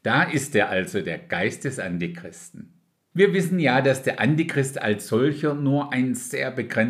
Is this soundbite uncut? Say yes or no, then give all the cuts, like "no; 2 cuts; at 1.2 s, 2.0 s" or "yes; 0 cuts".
yes; 0 cuts